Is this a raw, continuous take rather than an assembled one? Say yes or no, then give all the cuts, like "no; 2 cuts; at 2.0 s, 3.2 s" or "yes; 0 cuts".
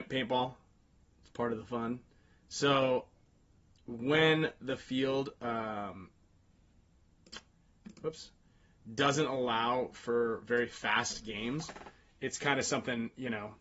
yes; 0 cuts